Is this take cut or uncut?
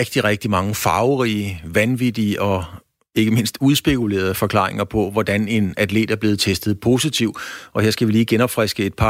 uncut